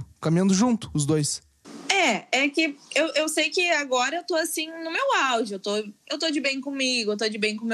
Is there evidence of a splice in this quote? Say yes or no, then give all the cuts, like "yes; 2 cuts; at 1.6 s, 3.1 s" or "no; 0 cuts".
no; 0 cuts